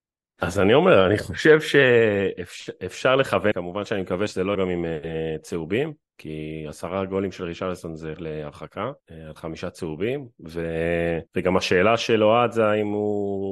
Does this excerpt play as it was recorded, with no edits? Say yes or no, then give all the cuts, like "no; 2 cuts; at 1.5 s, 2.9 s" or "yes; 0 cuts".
no; 6 cuts; at 3.5 s, 4.5 s, 6.1 s, 8.2 s, 9.0 s, 11.3 s